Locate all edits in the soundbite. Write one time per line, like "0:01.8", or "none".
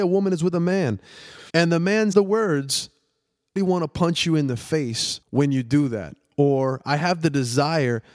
0:01.5
0:02.1
0:03.6
0:05.2